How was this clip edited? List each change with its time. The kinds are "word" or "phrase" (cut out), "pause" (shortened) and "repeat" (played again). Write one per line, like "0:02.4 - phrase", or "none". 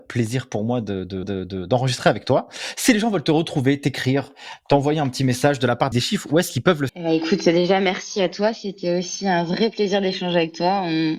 0:01.2 - repeat
0:05.9 - phrase
0:06.9 - word